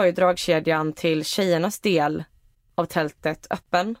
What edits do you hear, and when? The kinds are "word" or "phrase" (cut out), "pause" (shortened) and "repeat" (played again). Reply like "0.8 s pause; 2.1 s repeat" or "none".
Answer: none

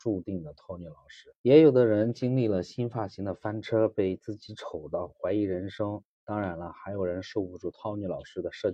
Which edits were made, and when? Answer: 1.4 s pause

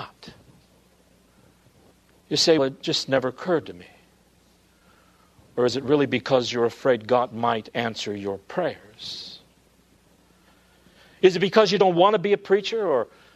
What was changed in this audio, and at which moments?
2.6 s word

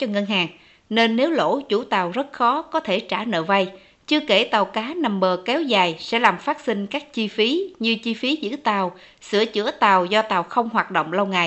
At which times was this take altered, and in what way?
none

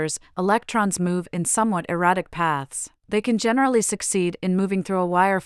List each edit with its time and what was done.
3.0 s pause

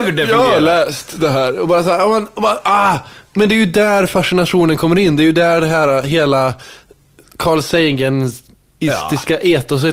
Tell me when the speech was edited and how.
none

